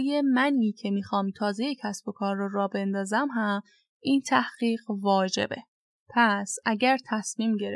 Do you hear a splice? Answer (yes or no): no